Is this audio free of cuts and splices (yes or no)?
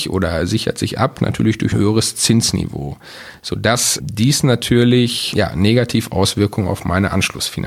no